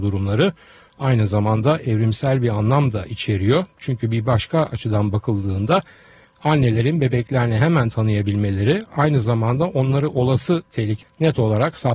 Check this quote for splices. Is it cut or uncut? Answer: cut